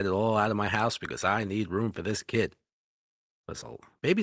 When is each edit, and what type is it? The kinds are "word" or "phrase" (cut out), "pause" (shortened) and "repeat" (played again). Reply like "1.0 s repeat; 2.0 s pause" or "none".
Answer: none